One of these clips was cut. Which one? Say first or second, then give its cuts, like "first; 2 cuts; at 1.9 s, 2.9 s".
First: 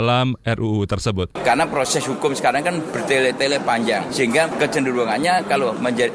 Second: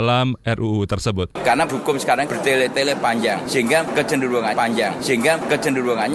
second; 3 cuts; at 1.7 s, 2.3 s, 4.5 s